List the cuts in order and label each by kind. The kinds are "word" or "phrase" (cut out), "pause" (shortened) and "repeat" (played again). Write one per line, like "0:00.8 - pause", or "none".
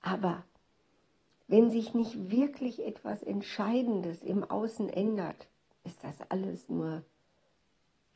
none